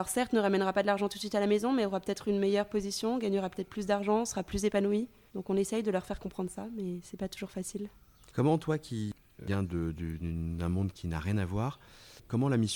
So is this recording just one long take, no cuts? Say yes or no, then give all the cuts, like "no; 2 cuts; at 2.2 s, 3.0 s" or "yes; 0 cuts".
yes; 0 cuts